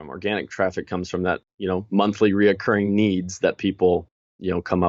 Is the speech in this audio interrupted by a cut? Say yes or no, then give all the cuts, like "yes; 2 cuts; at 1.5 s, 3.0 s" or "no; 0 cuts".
no; 0 cuts